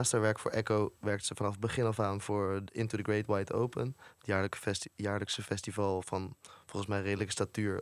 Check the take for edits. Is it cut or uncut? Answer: uncut